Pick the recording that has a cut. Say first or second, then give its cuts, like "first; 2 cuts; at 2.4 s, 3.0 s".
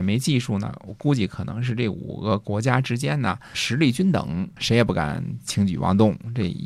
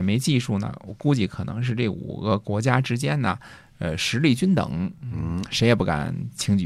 first; 2 cuts; at 3.5 s, 4.6 s